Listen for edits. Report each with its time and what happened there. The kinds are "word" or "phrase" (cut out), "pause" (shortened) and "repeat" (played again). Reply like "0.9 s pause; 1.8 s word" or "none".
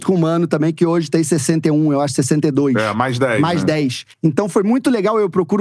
4.1 s pause